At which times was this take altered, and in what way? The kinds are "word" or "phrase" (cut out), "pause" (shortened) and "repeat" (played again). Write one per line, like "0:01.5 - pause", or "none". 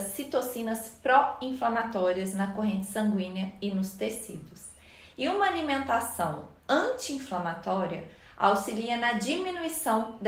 none